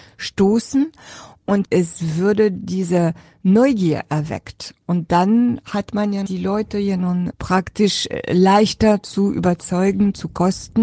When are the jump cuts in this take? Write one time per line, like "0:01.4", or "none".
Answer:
0:01.6
0:06.3
0:07.3